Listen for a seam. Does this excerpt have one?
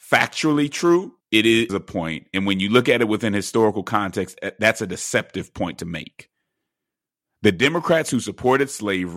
yes; 2 cuts; at 1.2 s, 1.7 s

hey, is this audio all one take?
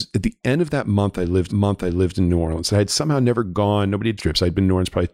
no; 2 cuts; at 1.5 s, 4.2 s

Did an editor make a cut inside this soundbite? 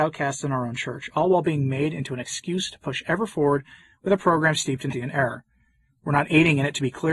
yes; 1 cut; at 4.9 s

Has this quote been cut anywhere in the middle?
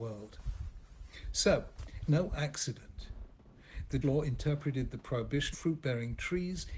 yes; 3 cuts; at 2.1 s, 4.0 s, 5.5 s

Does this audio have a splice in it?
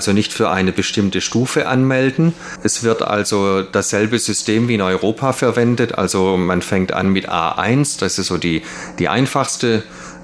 no; 0 cuts

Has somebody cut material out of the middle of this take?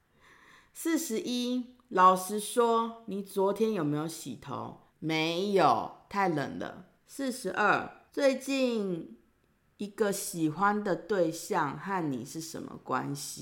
yes; 3 cuts; at 4.9 s, 7.0 s, 8.1 s

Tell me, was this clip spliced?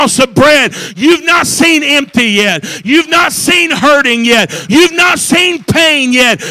no; 0 cuts

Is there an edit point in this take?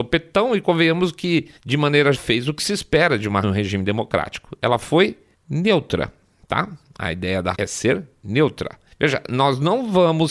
yes; 6 cuts; at 1.6 s, 2.1 s, 3.4 s, 5.3 s, 7.5 s, 8.9 s

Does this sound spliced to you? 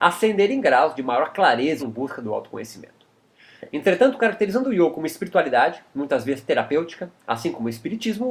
yes; 1 cut; at 1.8 s

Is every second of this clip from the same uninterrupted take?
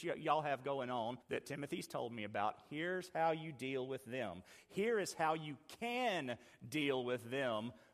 no; 1 cut; at 1.2 s

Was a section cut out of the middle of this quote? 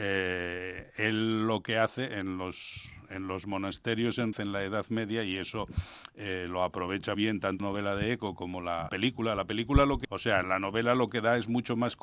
yes; 6 cuts; at 4.3 s, 7.1 s, 7.6 s, 8.9 s, 10.0 s, 10.4 s

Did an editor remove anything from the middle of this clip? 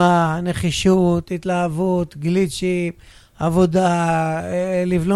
no; 0 cuts

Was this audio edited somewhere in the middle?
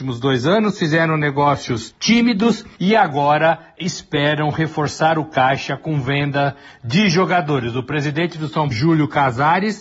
yes; 1 cut; at 8.7 s

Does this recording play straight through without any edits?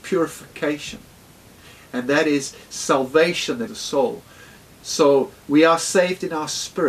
no; 1 cut; at 3.7 s

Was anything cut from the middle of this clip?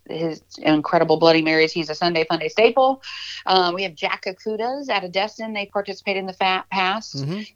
no; 0 cuts

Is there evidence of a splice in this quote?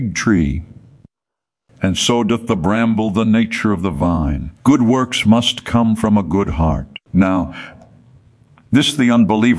yes; 2 cuts; at 4.6 s, 7.0 s

